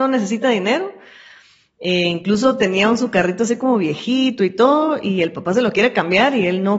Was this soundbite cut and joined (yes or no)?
no